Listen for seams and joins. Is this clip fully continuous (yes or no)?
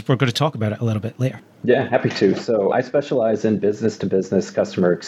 yes